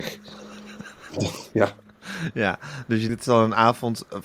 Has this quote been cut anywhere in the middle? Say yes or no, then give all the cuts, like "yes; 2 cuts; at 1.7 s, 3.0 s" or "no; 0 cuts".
yes; 1 cut; at 3.1 s